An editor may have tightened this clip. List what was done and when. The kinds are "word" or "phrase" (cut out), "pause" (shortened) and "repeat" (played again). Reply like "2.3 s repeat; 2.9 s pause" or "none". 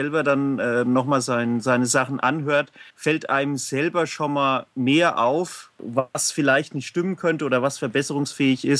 2.9 s pause